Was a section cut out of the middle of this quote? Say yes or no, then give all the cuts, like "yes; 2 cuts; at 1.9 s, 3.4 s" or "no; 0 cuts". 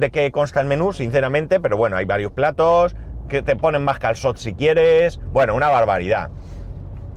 no; 0 cuts